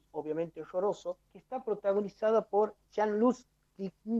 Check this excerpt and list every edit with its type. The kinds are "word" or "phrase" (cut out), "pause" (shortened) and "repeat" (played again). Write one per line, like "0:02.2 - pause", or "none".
0:01.3 - pause
0:02.8 - pause